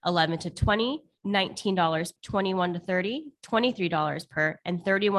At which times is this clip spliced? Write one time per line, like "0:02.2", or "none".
0:02.2